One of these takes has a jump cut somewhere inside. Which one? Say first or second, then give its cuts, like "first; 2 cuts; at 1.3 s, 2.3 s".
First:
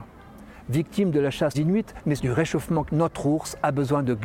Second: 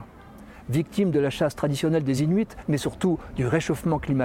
first; 3 cuts; at 1.5 s, 2.2 s, 2.9 s